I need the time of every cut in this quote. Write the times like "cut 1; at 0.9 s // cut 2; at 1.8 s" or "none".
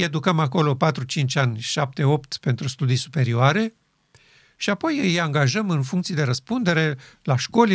none